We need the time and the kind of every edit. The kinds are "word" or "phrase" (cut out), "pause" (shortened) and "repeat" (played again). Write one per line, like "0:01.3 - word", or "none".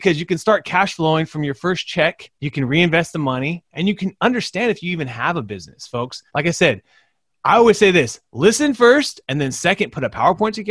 0:02.3 - pause
0:06.3 - pause